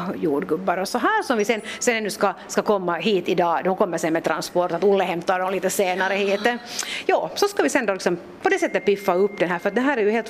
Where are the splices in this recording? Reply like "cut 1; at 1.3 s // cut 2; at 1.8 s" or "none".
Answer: none